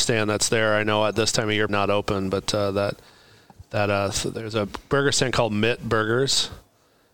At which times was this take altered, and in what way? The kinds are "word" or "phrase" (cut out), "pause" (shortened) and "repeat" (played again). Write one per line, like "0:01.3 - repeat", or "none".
0:01.7 - word